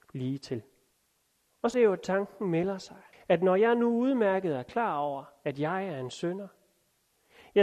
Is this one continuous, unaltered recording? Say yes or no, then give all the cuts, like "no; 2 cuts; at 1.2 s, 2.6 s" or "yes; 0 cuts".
no; 3 cuts; at 0.9 s, 1.7 s, 3.1 s